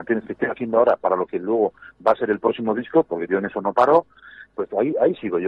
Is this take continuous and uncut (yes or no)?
yes